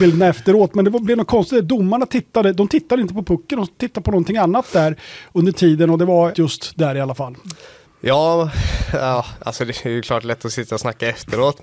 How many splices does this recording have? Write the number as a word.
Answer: two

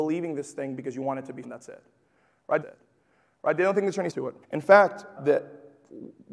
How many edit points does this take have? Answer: five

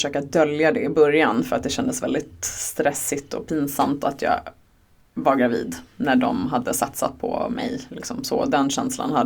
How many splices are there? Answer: one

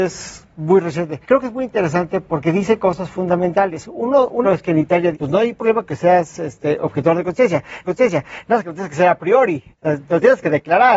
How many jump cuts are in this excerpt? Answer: five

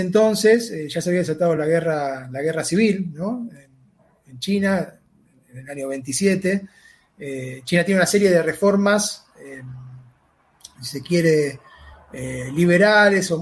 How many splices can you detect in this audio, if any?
zero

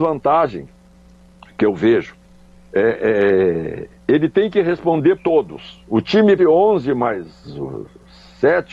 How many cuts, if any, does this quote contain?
three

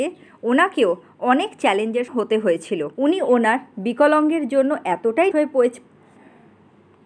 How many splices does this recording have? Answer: three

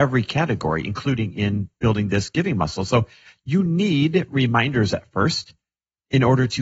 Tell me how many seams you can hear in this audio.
zero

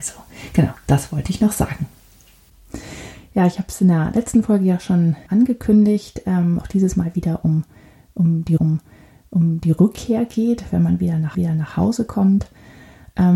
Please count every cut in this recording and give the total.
four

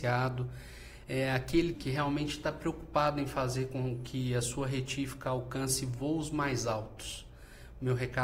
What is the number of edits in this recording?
one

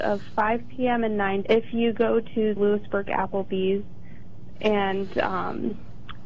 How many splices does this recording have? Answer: two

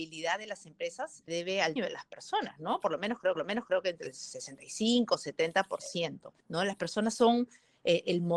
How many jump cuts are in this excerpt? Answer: four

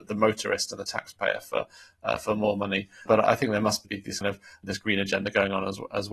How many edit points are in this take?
two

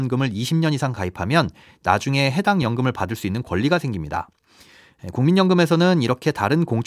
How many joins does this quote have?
zero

